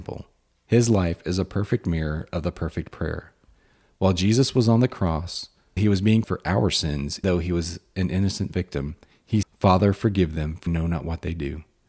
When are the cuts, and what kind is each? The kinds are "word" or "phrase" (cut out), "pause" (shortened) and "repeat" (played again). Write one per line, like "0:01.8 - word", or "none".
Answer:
0:05.8 - word
0:06.2 - word
0:07.2 - word
0:09.4 - word
0:10.7 - word